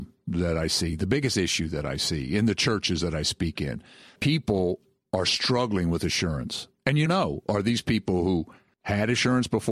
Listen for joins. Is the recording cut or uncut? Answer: cut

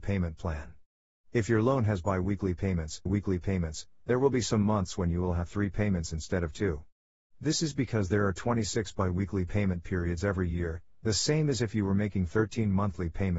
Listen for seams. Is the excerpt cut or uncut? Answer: cut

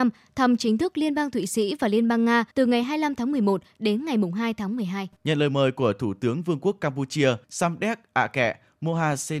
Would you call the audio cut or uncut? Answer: cut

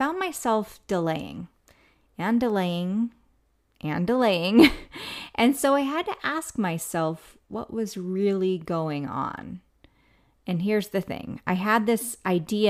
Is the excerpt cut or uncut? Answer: uncut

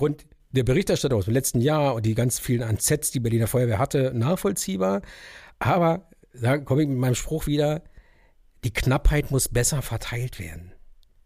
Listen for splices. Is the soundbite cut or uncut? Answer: uncut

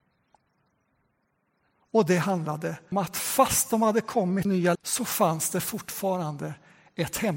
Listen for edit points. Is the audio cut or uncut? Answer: cut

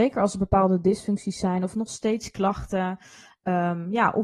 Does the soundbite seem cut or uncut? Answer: uncut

